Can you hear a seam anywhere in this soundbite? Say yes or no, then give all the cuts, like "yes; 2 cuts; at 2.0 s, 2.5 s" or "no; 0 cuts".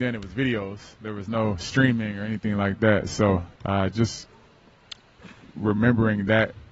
yes; 1 cut; at 3.6 s